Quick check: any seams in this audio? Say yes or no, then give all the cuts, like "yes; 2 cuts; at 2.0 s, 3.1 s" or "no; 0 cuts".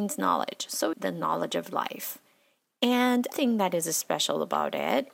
yes; 2 cuts; at 0.9 s, 3.3 s